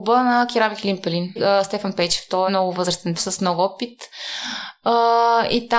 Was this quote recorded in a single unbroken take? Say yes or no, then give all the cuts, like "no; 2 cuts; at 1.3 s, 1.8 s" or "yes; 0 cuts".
no; 3 cuts; at 1.4 s, 2.5 s, 3.2 s